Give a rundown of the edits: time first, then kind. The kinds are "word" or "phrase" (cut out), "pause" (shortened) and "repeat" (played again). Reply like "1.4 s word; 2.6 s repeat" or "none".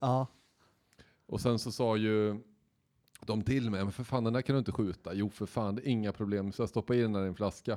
none